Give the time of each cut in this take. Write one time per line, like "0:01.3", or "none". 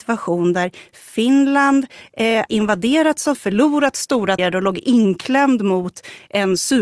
0:02.5
0:03.3
0:04.4